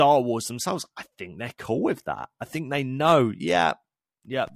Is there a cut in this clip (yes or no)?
no